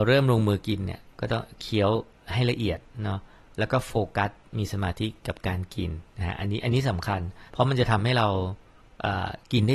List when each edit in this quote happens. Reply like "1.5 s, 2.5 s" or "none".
6.1 s, 7.5 s